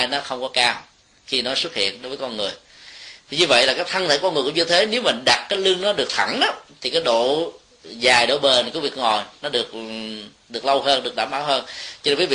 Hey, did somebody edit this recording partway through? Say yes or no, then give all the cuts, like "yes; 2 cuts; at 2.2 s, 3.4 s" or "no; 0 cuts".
no; 0 cuts